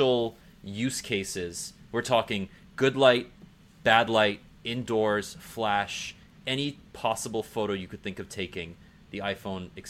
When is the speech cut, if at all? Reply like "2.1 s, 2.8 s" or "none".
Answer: none